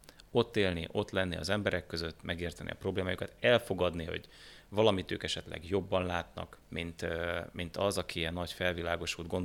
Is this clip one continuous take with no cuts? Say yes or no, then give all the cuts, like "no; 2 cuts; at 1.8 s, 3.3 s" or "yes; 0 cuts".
no; 1 cut; at 6.6 s